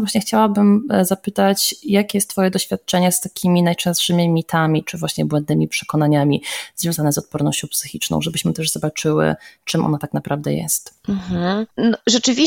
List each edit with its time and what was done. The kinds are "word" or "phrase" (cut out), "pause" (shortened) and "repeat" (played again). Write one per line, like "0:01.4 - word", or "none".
none